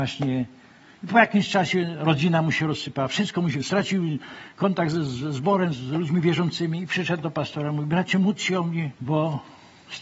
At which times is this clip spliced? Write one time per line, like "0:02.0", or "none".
0:09.0